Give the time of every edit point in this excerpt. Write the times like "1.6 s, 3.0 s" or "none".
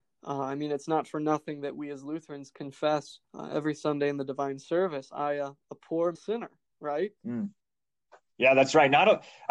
3.2 s, 6.1 s, 7.2 s